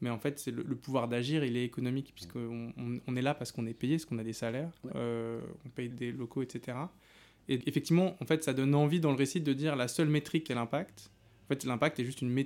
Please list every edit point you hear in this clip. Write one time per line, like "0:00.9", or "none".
0:05.9
0:07.6
0:10.5